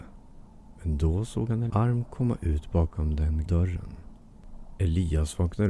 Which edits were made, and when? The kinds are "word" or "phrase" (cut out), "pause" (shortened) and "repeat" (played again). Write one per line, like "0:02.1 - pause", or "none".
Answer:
0:01.7 - word
0:03.5 - word